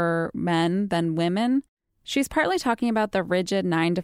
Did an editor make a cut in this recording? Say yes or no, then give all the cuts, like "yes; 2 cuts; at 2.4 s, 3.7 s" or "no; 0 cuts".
no; 0 cuts